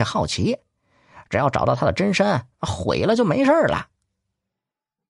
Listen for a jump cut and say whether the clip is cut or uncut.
uncut